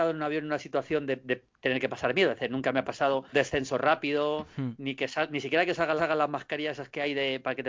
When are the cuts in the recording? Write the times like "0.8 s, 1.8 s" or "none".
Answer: 3.3 s, 6.0 s